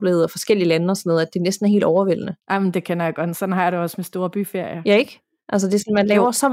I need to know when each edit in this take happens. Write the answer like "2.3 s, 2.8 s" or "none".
2.4 s